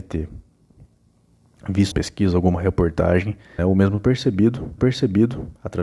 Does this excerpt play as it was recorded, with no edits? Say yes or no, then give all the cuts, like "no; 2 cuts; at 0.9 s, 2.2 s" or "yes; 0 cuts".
no; 3 cuts; at 1.9 s, 3.6 s, 4.8 s